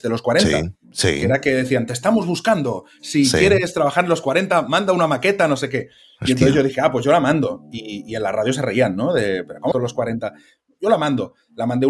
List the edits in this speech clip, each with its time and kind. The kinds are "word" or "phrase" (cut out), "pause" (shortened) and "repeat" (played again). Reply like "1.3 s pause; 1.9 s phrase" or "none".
9.7 s phrase